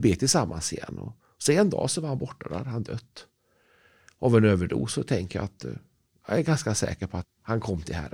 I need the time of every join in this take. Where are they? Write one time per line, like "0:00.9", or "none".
0:07.2